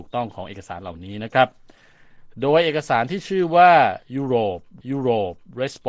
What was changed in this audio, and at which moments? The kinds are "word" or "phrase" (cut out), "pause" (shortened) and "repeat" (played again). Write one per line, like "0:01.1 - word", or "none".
0:04.8 - repeat